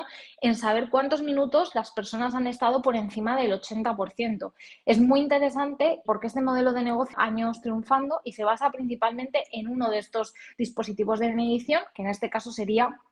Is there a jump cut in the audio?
yes; 2 cuts; at 6.0 s, 7.1 s

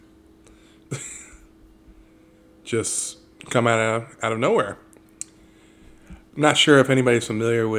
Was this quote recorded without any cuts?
yes; 0 cuts

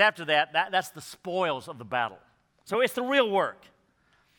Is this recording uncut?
yes; 0 cuts

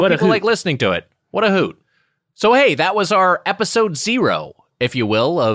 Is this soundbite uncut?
yes; 0 cuts

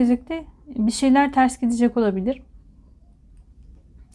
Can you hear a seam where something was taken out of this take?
no; 0 cuts

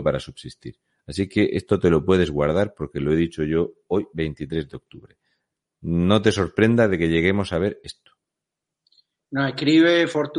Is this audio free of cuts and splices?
yes; 0 cuts

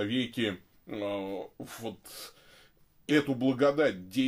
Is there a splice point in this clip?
yes; 1 cut; at 3.1 s

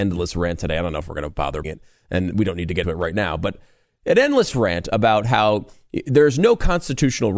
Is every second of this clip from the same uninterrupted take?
no; 2 cuts; at 1.6 s, 2.8 s

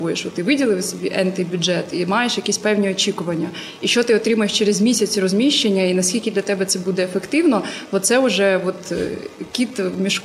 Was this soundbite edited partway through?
no; 0 cuts

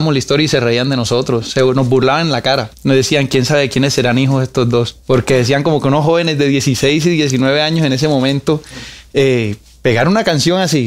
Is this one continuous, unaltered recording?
no; 2 cuts; at 2.7 s, 5.0 s

